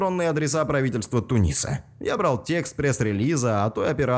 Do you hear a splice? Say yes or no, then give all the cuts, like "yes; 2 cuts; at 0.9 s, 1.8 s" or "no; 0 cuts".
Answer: no; 0 cuts